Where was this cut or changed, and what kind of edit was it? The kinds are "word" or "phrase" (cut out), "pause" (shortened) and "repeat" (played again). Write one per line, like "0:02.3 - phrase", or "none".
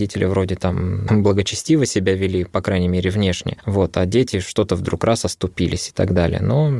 0:01.1 - word